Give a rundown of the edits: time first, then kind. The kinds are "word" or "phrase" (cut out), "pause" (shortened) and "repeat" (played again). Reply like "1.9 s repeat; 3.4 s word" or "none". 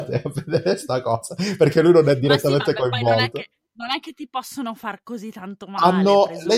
none